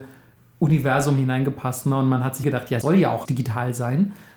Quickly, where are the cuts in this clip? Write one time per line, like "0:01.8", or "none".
0:02.4
0:02.8
0:03.2